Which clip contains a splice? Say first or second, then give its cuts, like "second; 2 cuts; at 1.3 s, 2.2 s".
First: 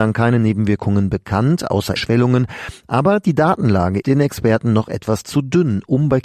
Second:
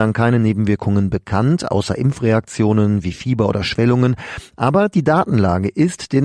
first; 2 cuts; at 2.0 s, 4.0 s